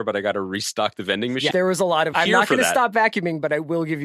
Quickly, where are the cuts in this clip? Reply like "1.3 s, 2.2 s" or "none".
1.5 s, 2.1 s